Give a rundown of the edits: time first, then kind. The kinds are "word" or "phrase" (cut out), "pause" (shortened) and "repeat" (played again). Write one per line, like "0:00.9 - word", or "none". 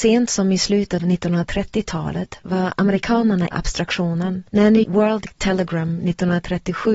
0:01.0 - word
0:03.5 - phrase
0:04.5 - pause
0:04.8 - word